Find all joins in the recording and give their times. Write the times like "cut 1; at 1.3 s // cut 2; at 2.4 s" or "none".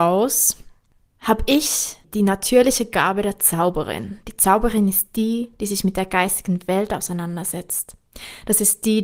none

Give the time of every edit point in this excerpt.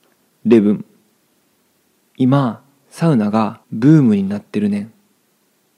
cut 1; at 3.6 s

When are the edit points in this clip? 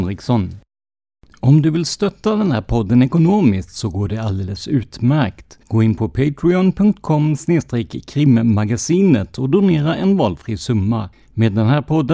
cut 1; at 5.6 s // cut 2; at 11.1 s

